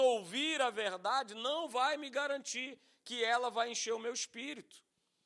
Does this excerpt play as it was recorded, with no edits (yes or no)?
yes